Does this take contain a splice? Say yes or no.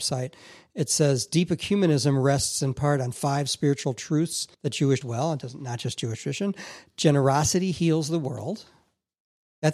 yes